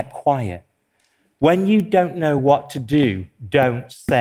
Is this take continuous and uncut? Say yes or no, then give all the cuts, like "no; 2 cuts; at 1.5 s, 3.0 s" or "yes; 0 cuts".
yes; 0 cuts